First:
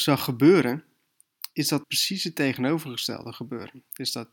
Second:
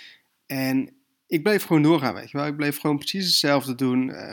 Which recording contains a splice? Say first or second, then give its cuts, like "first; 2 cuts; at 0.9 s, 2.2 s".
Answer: first; 1 cut; at 1.8 s